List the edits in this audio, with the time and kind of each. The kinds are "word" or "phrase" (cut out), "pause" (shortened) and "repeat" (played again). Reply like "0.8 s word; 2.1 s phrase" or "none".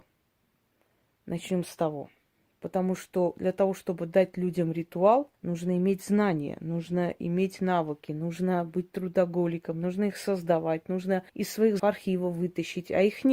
5.3 s pause; 11.3 s pause; 11.8 s word